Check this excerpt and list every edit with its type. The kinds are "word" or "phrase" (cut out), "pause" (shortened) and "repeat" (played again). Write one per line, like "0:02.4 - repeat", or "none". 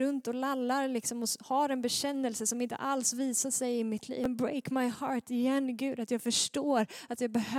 none